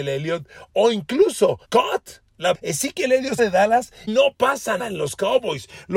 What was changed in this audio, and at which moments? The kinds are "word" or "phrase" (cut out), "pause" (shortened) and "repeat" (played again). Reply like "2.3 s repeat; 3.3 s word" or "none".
1.6 s pause; 2.5 s word; 3.4 s phrase; 4.1 s word; 4.8 s word